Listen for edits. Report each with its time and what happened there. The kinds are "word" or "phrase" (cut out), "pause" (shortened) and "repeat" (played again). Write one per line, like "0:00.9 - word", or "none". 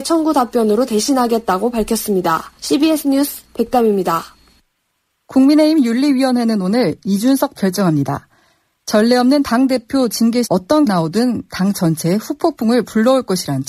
0:02.6 - pause
0:03.5 - pause
0:07.5 - phrase
0:10.4 - word
0:10.8 - word